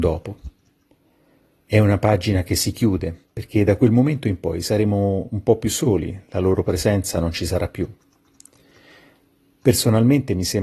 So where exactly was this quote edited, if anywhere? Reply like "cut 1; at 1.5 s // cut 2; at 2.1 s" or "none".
cut 1; at 3.2 s